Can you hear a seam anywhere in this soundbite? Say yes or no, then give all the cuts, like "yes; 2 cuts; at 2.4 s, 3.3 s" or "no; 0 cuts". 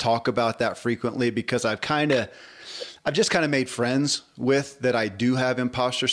no; 0 cuts